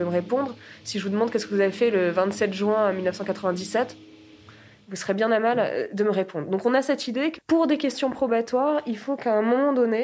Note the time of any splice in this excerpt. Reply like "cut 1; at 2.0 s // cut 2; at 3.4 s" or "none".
cut 1; at 7.4 s